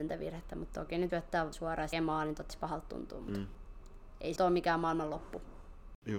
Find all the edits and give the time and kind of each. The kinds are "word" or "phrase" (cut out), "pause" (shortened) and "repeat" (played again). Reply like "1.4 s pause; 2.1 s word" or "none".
1.1 s word; 1.5 s word; 1.9 s word; 2.5 s word; 4.4 s word